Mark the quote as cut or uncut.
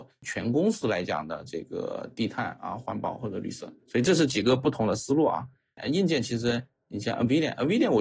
uncut